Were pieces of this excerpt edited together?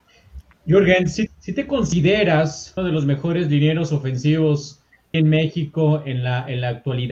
yes; 3 cuts; at 1.3 s, 2.8 s, 5.1 s

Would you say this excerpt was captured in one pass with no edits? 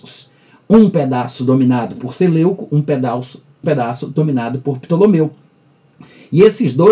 no; 1 cut; at 3.6 s

